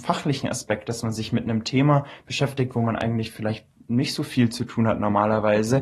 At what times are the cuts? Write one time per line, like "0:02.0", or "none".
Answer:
none

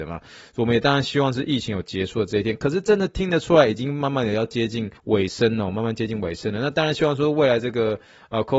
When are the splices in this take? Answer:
0:05.0

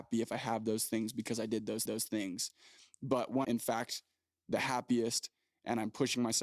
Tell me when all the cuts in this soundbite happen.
0:01.9
0:03.4

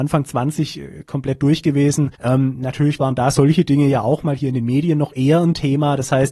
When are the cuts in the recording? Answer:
0:02.1

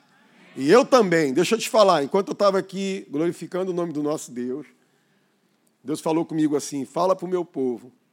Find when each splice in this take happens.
none

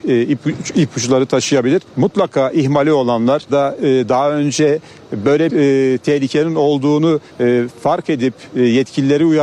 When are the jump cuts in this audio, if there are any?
0:01.9
0:03.5
0:05.5
0:07.3

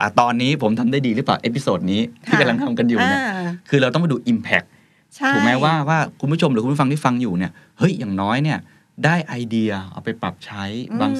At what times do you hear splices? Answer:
none

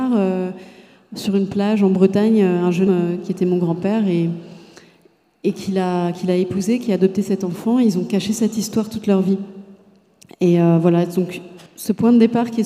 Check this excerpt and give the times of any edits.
0:02.9
0:11.7

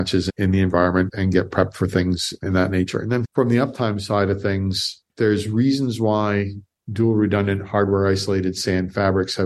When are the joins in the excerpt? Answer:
0:05.1
0:06.8

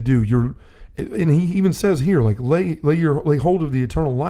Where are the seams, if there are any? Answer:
none

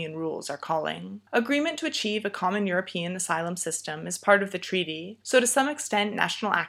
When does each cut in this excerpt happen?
0:01.3
0:05.2

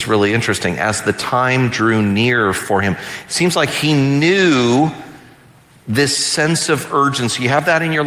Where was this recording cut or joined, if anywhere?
none

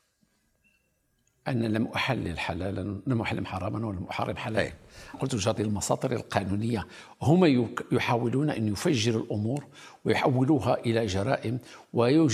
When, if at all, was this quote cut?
0:05.1
0:05.6

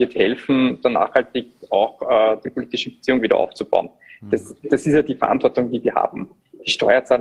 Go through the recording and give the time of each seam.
none

